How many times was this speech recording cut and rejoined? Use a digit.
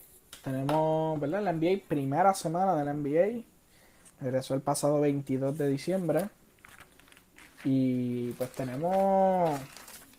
0